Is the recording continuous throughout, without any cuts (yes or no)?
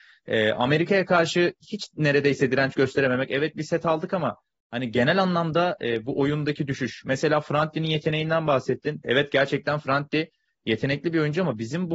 yes